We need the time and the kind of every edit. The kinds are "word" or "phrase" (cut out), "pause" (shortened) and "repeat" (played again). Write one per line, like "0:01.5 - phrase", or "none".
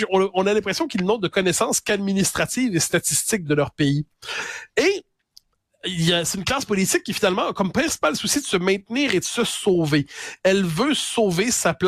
none